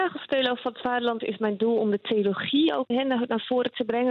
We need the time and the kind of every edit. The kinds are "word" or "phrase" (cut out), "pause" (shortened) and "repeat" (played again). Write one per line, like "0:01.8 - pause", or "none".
0:01.2 - word
0:02.9 - word